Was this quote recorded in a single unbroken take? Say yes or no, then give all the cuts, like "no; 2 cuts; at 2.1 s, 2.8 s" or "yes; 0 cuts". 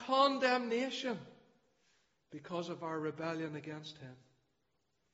yes; 0 cuts